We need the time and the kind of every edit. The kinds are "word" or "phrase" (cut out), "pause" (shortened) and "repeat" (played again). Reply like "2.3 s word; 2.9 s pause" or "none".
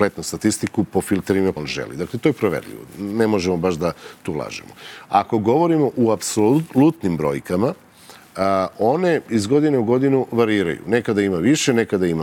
1.6 s word